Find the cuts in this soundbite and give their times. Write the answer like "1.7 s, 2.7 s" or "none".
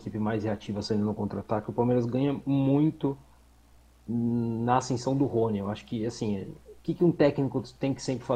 none